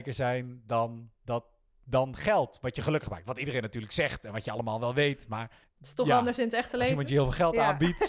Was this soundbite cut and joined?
yes; 1 cut; at 5.6 s

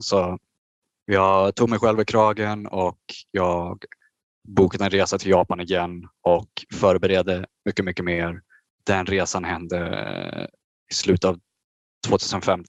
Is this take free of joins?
yes; 0 cuts

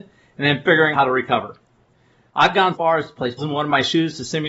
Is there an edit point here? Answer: yes; 3 cuts; at 0.9 s, 2.7 s, 3.4 s

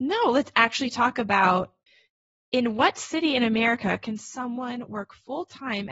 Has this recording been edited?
no; 0 cuts

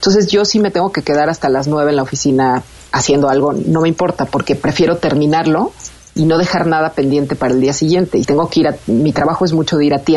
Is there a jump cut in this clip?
yes; 1 cut; at 8.2 s

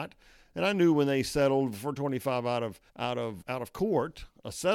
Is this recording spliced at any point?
yes; 2 cuts; at 2.9 s, 3.4 s

